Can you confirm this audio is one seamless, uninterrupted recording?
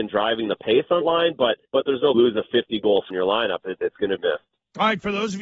no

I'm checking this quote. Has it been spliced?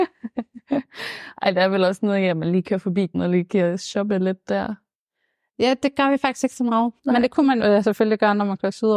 yes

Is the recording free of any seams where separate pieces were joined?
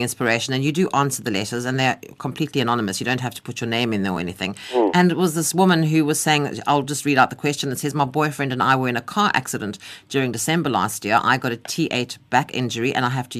yes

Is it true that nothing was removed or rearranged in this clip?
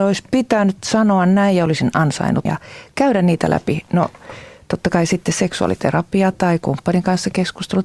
no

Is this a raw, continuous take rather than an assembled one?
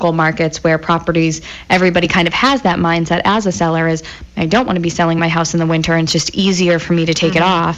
yes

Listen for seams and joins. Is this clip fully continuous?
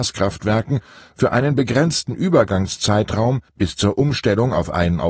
no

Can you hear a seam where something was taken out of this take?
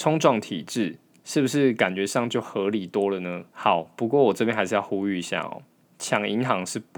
yes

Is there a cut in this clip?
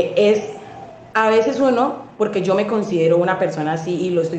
no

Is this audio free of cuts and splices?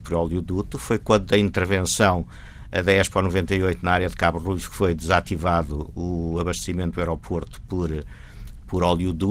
yes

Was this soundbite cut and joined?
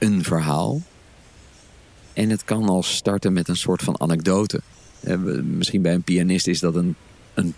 no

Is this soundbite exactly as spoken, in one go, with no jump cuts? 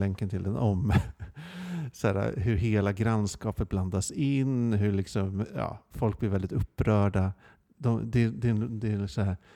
yes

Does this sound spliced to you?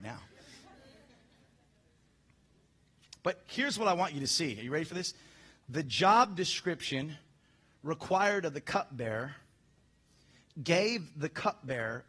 no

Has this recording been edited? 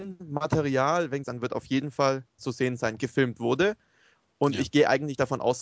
yes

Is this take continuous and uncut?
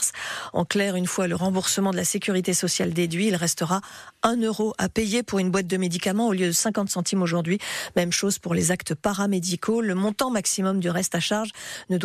yes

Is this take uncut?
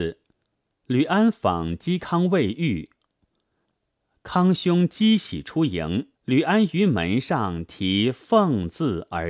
no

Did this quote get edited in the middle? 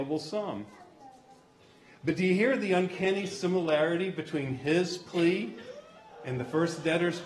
no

